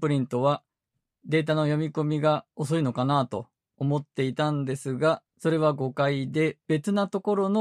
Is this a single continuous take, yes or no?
no